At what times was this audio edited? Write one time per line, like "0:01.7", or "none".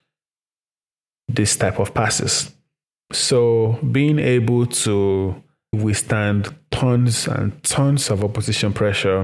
0:02.8
0:05.7